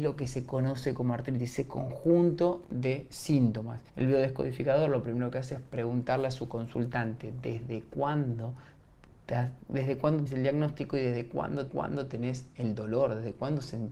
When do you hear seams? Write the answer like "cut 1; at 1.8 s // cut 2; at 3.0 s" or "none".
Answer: cut 1; at 3.9 s // cut 2; at 10.3 s // cut 3; at 11.7 s